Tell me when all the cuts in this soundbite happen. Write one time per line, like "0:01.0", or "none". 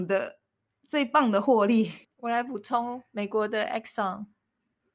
0:02.0